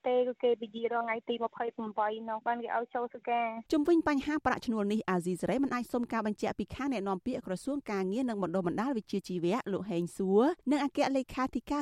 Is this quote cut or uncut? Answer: cut